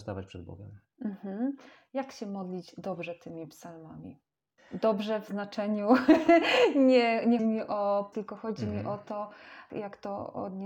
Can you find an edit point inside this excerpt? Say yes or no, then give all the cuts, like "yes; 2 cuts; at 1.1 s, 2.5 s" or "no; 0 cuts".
yes; 3 cuts; at 4.6 s, 7.4 s, 8.1 s